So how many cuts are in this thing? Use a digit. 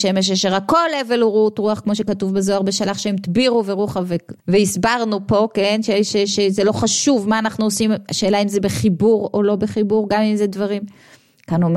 1